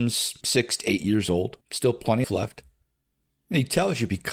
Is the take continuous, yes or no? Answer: no